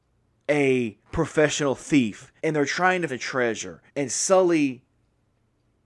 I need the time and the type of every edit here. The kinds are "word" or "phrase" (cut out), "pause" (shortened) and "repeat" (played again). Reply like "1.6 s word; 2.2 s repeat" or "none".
1.0 s pause; 2.4 s pause; 3.1 s word; 3.9 s pause